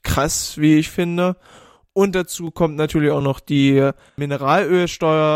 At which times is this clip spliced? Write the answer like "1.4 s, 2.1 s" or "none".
none